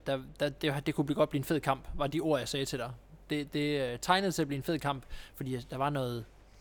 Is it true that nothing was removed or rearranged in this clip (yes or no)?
yes